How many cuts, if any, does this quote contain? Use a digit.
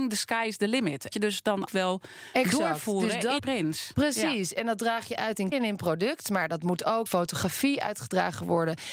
5